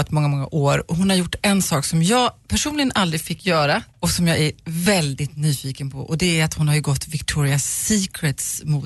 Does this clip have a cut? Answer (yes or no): yes